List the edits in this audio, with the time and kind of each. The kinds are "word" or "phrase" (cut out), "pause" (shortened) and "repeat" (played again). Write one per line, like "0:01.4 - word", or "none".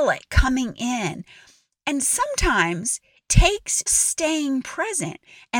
0:03.3 - word
0:03.9 - word